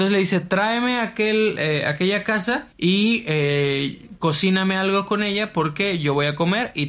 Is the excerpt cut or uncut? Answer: cut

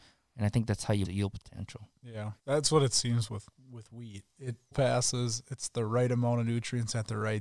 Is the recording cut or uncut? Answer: cut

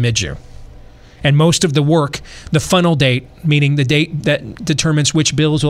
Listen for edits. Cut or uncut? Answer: uncut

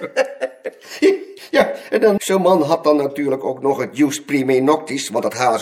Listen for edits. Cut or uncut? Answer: cut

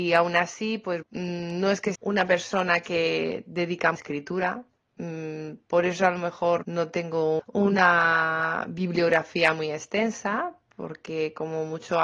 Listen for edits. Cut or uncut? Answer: cut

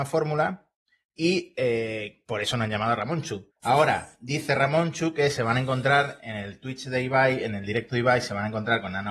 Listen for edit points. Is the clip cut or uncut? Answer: cut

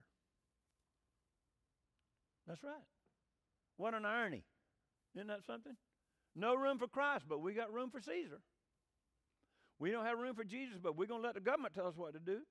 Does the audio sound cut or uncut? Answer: uncut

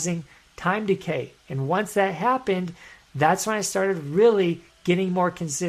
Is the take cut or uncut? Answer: uncut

